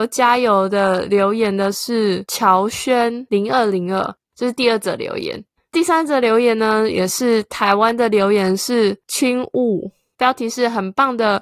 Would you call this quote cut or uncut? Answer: uncut